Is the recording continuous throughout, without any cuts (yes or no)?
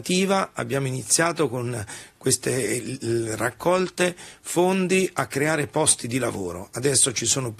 yes